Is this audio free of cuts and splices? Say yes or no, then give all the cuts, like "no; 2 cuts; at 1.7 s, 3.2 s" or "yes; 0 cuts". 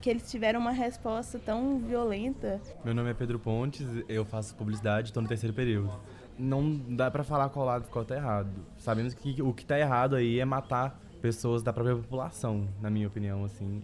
no; 1 cut; at 7.9 s